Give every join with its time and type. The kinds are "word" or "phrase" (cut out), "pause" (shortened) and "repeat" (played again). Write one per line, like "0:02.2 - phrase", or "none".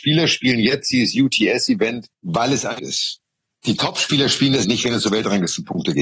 0:02.1 - pause
0:02.8 - word
0:04.6 - word